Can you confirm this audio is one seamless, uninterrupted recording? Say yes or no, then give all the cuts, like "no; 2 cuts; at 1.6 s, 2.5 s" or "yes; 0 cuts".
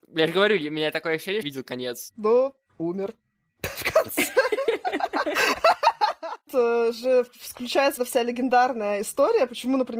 no; 4 cuts; at 1.4 s, 2.7 s, 6.5 s, 8.0 s